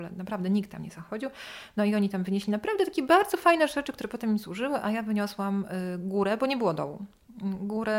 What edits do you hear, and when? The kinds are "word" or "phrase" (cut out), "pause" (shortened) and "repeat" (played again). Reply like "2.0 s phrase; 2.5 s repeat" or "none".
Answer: none